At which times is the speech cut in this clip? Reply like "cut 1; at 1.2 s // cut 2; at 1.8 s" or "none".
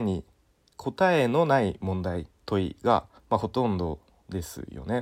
cut 1; at 2.4 s // cut 2; at 3.2 s